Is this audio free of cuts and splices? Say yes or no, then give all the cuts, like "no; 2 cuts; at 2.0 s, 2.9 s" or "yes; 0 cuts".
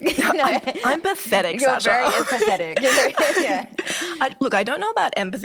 yes; 0 cuts